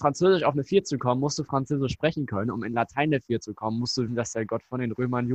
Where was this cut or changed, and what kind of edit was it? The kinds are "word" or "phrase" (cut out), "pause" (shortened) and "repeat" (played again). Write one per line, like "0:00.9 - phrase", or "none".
0:04.1 - word

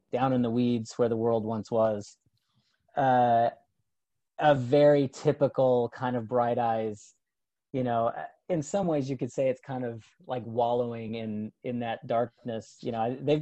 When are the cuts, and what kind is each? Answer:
none

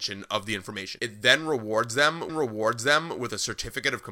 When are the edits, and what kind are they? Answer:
0:02.3 - repeat

